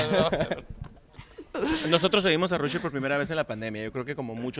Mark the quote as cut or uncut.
uncut